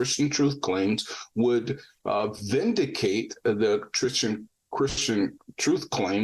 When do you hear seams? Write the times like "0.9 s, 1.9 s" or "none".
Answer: none